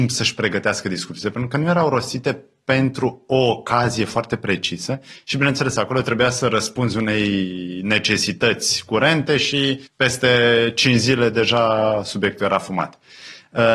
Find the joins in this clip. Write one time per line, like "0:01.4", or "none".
0:09.9